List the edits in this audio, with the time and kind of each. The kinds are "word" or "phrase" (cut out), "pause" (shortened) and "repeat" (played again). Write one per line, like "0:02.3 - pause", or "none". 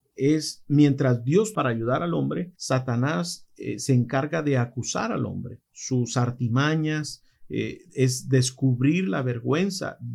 0:01.5 - phrase
0:02.5 - pause
0:05.7 - pause
0:07.9 - pause